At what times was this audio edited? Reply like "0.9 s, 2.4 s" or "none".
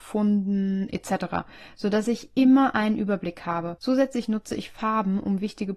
3.8 s